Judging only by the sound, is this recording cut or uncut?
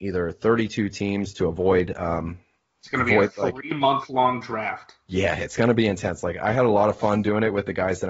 uncut